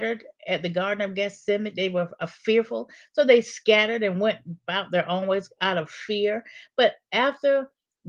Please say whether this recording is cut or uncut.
uncut